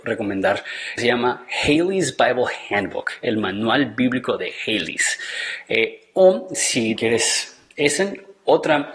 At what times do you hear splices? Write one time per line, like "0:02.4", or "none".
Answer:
0:01.0
0:07.0